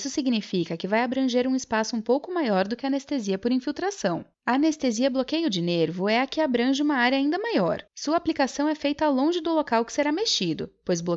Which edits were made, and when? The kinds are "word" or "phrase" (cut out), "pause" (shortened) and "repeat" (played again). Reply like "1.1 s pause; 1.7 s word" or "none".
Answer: 4.3 s pause; 7.9 s pause